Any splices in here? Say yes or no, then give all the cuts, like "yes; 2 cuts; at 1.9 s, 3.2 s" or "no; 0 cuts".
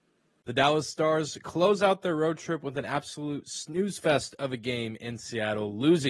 no; 0 cuts